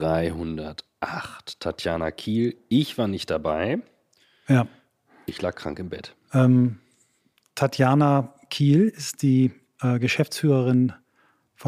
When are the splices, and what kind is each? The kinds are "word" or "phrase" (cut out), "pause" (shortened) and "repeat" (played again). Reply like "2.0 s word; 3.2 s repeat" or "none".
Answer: none